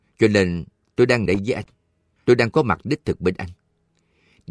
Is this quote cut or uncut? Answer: cut